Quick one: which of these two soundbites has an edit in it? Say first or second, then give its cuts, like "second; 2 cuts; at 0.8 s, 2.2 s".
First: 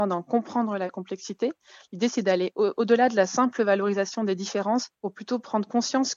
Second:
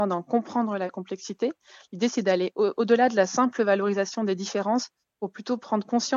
first; 1 cut; at 4.9 s